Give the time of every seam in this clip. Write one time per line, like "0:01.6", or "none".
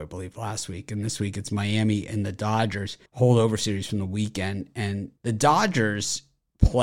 0:03.1
0:05.2

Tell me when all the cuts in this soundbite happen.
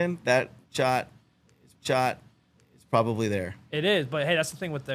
0:01.7

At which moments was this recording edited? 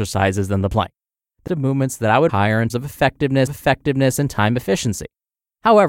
0:01.5
0:02.3
0:02.7
0:03.5

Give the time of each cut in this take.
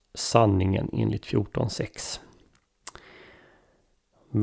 none

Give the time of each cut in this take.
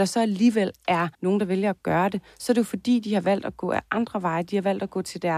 0:01.1

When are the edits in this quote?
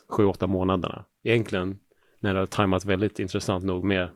0:01.2

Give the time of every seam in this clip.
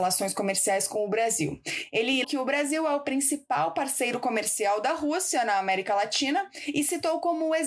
0:02.2

